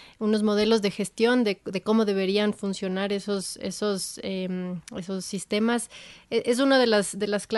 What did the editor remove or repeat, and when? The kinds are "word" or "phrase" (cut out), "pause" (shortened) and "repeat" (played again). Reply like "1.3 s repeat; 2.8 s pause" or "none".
none